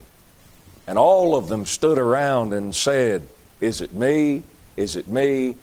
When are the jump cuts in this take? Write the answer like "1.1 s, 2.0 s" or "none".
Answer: none